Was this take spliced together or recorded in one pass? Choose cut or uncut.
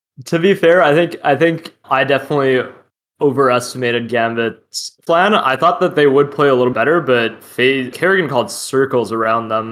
cut